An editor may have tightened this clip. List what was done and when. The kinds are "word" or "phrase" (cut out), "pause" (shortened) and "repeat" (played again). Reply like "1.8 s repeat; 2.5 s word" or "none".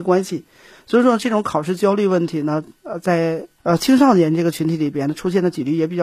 3.6 s pause